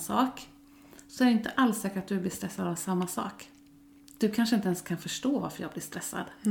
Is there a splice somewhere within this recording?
no; 0 cuts

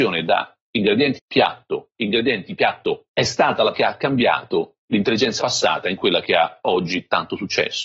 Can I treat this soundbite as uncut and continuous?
no; 5 cuts; at 1.1 s, 1.9 s, 3.1 s, 3.7 s, 5.4 s

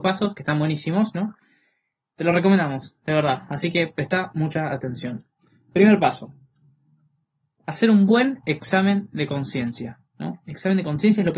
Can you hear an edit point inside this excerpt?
no; 0 cuts

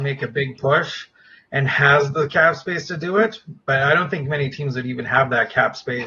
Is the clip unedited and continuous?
yes; 0 cuts

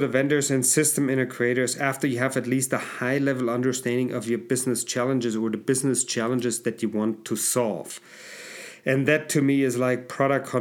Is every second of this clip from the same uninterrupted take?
yes; 0 cuts

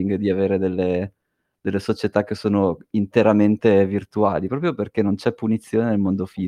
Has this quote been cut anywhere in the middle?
no; 0 cuts

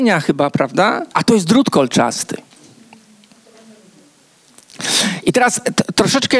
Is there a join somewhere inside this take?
yes; 1 cut; at 1.1 s

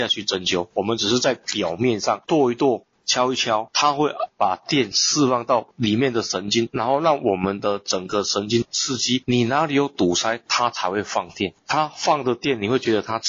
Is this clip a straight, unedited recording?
no; 2 cuts; at 2.9 s, 5.7 s

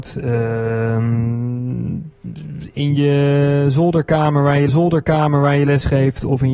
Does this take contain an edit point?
yes; 1 cut; at 4.7 s

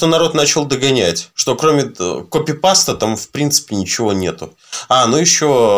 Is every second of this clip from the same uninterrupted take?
yes; 0 cuts

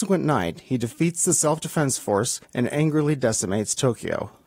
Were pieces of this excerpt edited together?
yes; 1 cut; at 2.4 s

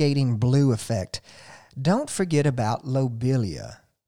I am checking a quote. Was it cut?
no; 0 cuts

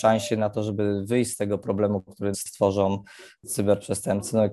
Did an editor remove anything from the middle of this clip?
yes; 1 cut; at 2.3 s

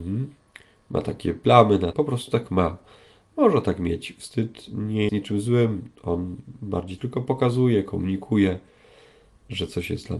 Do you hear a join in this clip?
yes; 3 cuts; at 1.9 s, 5.1 s, 7.0 s

